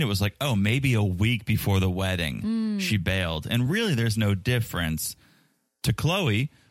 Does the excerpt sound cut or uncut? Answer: uncut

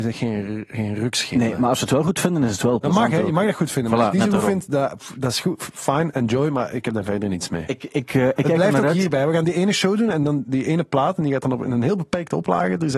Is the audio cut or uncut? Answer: uncut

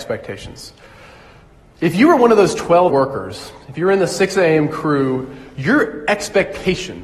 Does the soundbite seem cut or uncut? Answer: cut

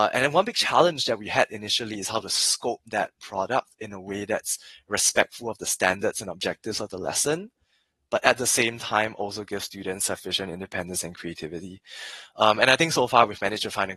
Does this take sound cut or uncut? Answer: uncut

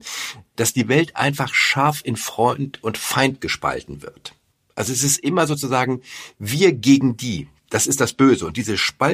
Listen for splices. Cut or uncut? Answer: uncut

